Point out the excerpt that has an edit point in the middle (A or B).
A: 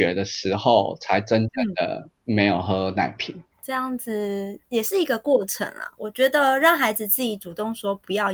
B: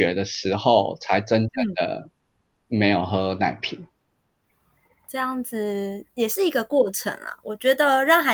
A